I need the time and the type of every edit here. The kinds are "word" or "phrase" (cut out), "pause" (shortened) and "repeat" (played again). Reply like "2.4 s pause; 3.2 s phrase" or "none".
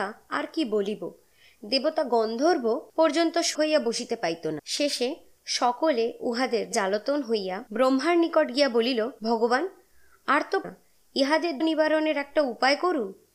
3.5 s word; 4.6 s word; 6.7 s word; 7.7 s pause; 9.2 s pause; 10.6 s word; 11.6 s word